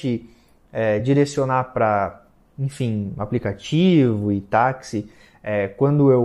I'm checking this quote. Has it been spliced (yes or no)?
no